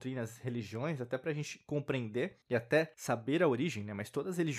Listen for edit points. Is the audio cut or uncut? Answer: cut